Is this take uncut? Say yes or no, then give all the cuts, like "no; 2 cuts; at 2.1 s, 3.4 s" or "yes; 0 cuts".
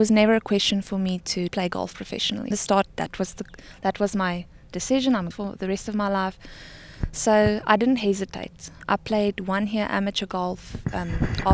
no; 3 cuts; at 1.5 s, 2.5 s, 5.3 s